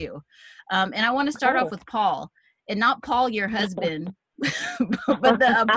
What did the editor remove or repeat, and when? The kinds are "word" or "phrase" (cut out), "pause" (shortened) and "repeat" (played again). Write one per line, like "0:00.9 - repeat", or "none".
none